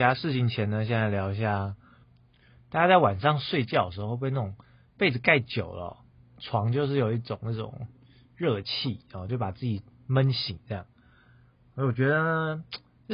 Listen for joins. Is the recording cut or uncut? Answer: uncut